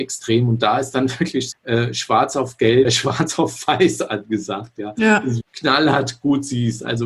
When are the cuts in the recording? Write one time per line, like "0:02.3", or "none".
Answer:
0:01.5
0:02.8
0:05.4